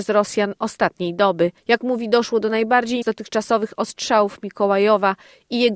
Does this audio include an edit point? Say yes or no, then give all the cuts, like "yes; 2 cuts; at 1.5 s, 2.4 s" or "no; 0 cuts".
yes; 2 cuts; at 1.6 s, 3.0 s